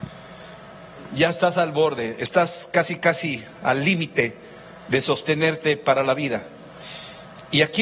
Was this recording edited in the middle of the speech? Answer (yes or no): no